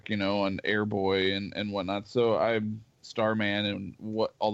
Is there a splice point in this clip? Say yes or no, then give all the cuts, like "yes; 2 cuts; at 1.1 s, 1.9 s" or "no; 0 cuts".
no; 0 cuts